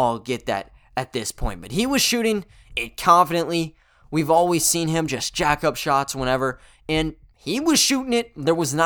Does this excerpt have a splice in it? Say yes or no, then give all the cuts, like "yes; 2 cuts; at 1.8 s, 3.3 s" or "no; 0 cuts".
no; 0 cuts